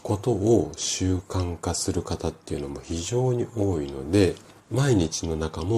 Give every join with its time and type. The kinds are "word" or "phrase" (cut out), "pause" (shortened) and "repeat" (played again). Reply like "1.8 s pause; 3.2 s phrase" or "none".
4.6 s word